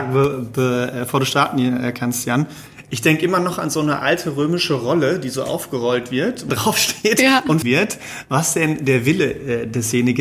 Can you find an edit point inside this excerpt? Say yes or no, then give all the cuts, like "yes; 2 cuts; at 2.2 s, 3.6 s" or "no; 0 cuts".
yes; 2 cuts; at 6.5 s, 7.6 s